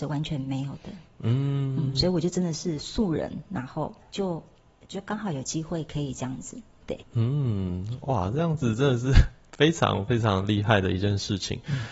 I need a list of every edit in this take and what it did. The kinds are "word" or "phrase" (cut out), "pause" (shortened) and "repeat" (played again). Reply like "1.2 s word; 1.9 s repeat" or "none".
4.0 s pause; 7.0 s pause